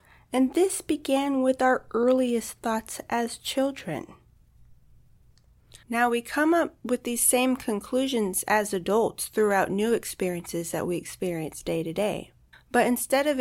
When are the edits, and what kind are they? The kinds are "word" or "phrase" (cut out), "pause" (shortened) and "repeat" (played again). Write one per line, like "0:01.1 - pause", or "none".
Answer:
0:05.8 - pause
0:12.5 - pause